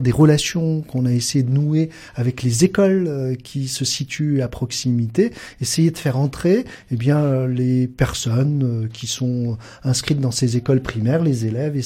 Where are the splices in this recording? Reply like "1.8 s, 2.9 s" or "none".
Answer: none